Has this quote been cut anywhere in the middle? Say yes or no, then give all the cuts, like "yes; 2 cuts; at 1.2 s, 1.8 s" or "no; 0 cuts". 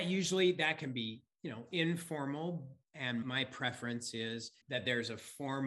yes; 2 cuts; at 3.2 s, 4.6 s